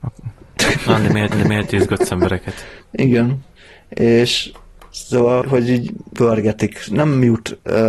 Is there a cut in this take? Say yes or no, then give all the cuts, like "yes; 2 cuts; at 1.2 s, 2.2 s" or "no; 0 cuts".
yes; 5 cuts; at 1.3 s, 2.8 s, 5.4 s, 6.1 s, 6.9 s